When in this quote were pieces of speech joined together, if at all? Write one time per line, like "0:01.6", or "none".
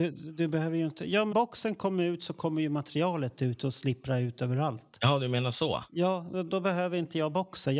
0:01.3
0:06.5